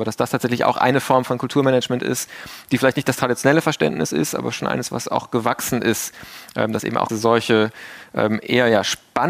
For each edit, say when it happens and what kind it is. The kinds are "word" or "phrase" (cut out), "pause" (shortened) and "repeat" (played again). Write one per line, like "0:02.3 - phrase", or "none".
0:07.1 - word